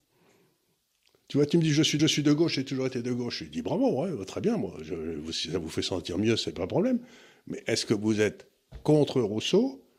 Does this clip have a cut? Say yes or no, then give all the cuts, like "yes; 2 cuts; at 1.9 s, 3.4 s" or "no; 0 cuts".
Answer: yes; 1 cut; at 2.0 s